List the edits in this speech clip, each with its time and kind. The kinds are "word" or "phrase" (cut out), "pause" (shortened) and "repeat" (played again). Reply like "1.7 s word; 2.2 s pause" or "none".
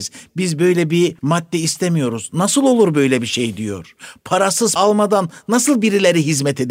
1.2 s pause; 4.8 s word